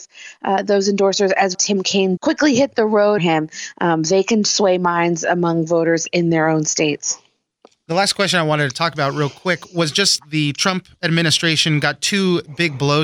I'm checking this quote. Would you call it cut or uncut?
cut